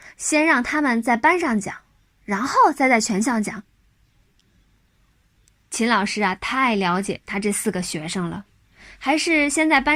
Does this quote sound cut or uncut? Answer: uncut